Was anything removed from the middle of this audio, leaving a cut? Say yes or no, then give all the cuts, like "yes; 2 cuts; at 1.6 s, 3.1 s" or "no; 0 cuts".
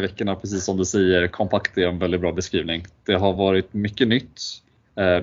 no; 0 cuts